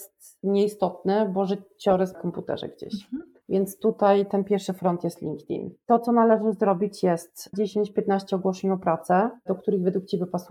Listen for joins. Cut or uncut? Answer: cut